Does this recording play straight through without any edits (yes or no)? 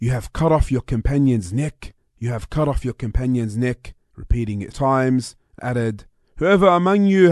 no